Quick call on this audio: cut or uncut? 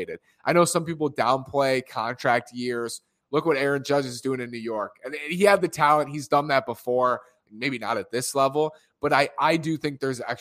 uncut